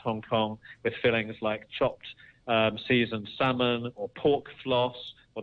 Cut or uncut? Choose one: uncut